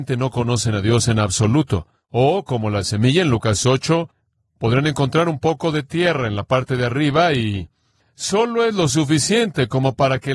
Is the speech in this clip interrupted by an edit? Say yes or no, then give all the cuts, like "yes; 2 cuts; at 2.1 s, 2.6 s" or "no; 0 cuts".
no; 0 cuts